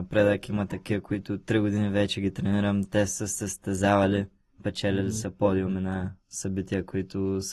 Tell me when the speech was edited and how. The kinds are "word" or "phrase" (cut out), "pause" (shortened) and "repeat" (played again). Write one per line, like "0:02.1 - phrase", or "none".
none